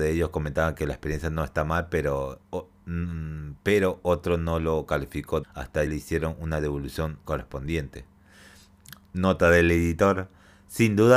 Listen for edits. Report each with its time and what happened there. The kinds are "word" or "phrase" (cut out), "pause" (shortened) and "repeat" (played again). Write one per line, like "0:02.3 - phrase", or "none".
0:02.5 - word
0:05.4 - phrase
0:05.9 - word
0:07.2 - word